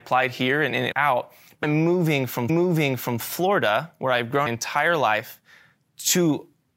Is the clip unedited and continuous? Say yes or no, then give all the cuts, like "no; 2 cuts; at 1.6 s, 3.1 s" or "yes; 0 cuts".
no; 4 cuts; at 0.9 s, 1.6 s, 2.5 s, 4.5 s